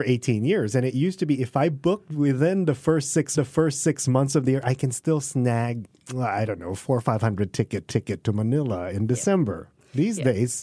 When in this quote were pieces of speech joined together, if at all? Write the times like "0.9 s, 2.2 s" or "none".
3.3 s, 7.9 s

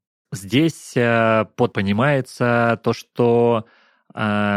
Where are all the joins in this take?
1.7 s

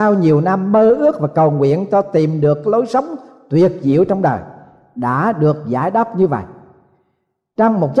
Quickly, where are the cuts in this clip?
none

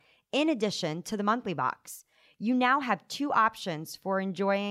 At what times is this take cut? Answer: none

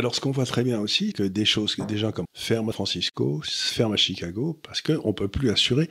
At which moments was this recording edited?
1.1 s, 2.2 s, 2.7 s

